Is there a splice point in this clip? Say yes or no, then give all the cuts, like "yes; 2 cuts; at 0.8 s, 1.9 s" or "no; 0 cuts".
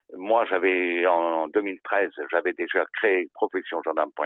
no; 0 cuts